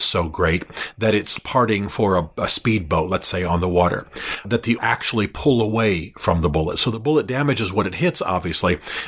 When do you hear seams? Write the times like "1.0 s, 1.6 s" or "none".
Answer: 1.4 s, 4.4 s, 4.8 s